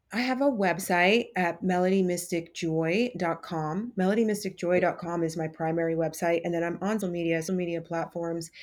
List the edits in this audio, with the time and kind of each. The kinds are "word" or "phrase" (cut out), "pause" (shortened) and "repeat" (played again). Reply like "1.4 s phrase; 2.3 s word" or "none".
7.0 s word; 7.5 s phrase